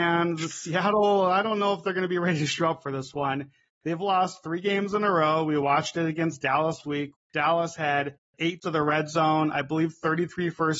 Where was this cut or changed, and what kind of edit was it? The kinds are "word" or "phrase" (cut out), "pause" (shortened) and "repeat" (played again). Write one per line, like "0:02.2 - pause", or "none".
0:06.8 - word
0:07.1 - word
0:08.6 - word